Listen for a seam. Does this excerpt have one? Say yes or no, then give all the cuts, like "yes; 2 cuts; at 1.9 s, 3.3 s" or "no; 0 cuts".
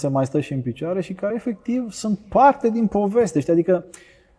no; 0 cuts